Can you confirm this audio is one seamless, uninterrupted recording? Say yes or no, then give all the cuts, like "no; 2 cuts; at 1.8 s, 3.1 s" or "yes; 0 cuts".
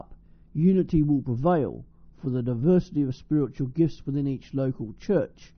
yes; 0 cuts